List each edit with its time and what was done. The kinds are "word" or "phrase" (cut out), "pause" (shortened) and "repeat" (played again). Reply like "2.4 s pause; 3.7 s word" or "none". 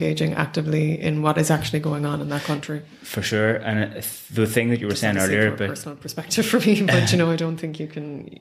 none